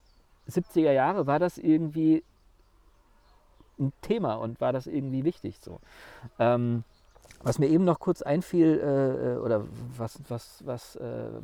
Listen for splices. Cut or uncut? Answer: uncut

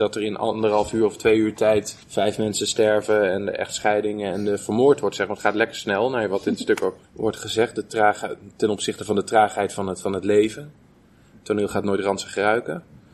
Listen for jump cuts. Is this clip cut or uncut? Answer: cut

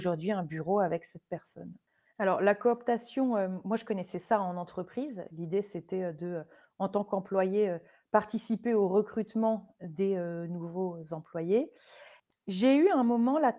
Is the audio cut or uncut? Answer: uncut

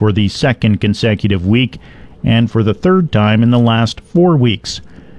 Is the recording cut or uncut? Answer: uncut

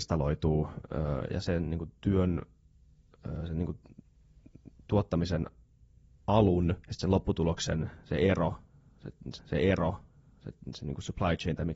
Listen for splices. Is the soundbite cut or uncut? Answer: cut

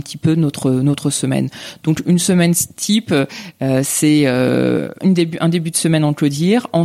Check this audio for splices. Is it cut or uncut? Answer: cut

